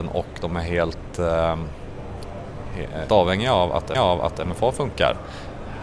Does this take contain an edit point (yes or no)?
yes